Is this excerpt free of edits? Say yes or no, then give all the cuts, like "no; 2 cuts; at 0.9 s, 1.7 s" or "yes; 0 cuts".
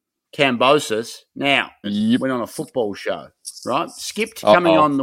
no; 1 cut; at 1.8 s